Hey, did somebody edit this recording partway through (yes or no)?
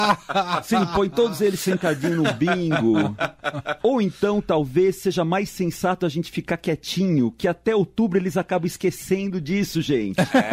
yes